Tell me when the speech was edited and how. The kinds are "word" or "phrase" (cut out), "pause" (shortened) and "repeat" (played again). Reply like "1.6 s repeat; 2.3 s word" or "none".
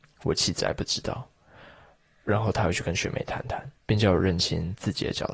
3.8 s pause